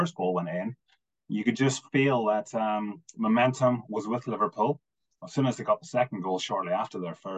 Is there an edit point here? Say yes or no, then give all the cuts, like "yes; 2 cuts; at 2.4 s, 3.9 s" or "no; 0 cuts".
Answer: no; 0 cuts